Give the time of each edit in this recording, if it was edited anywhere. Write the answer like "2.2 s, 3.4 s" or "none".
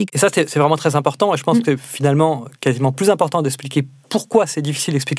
none